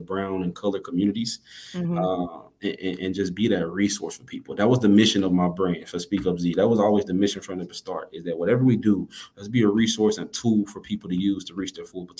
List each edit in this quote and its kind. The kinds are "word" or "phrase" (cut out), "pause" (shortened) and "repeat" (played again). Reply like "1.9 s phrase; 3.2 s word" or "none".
none